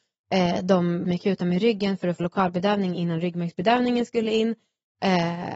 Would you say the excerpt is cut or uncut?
cut